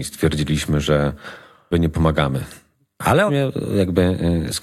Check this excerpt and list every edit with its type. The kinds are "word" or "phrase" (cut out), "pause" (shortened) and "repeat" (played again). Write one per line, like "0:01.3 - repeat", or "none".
0:01.7 - phrase
0:03.3 - word